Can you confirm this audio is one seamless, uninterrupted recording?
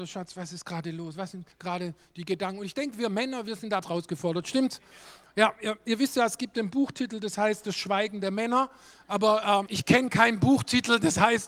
no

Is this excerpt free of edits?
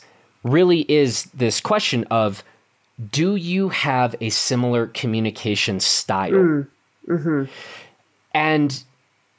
yes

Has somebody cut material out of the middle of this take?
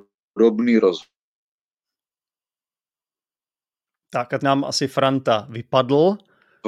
yes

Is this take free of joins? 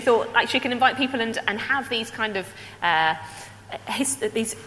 yes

